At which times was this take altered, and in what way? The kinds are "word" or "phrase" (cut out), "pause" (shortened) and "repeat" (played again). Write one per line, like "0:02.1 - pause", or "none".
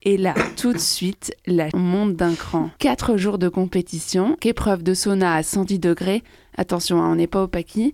0:01.7 - word
0:02.8 - pause
0:04.4 - word